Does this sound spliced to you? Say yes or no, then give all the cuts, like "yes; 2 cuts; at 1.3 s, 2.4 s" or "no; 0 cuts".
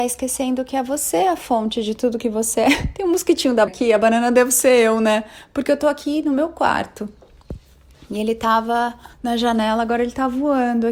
yes; 2 cuts; at 3.7 s, 9.1 s